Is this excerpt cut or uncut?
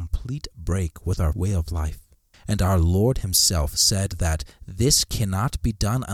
cut